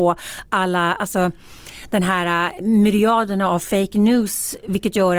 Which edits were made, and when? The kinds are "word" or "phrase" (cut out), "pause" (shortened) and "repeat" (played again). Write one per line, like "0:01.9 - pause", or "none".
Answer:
none

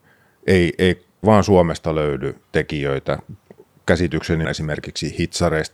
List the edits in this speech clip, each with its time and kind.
0:01.2 - word
0:02.4 - pause
0:04.4 - word

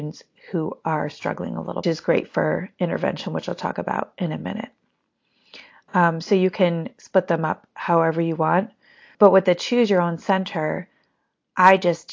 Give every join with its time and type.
0:01.8 - phrase

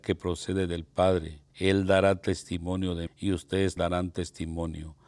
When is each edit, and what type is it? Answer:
0:01.5 - pause
0:03.1 - word
0:03.8 - word

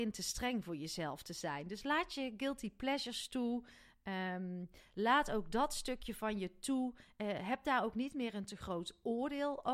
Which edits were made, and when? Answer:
none

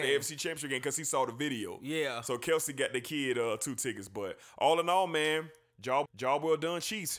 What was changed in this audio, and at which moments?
0:06.1 - repeat

